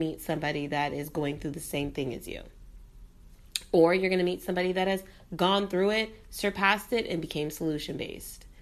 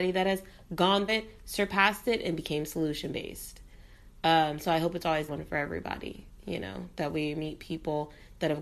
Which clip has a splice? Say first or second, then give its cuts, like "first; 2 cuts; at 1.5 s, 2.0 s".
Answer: second; 2 cuts; at 1.1 s, 5.3 s